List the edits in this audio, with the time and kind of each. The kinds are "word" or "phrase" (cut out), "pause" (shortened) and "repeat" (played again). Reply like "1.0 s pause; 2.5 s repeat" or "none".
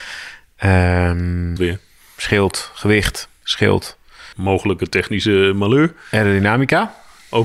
1.6 s word; 4.3 s pause